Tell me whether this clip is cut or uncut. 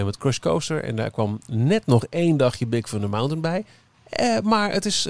uncut